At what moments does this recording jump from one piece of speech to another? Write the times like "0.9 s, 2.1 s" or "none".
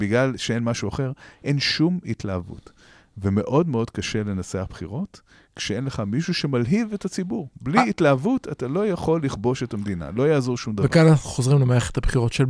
none

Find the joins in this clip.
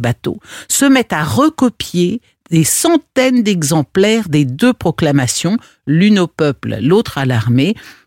none

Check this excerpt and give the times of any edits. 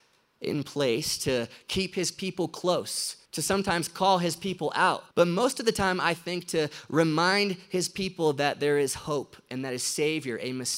3.2 s, 5.1 s

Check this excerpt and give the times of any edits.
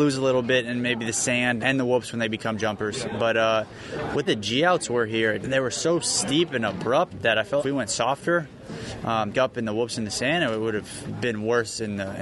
1.6 s, 4.3 s, 5.4 s, 7.6 s, 9.3 s

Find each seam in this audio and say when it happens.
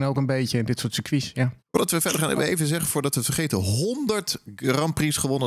1.6 s

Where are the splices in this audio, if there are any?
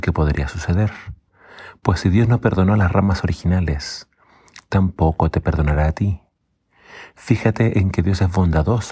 none

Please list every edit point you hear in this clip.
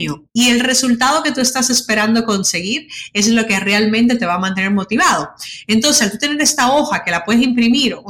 none

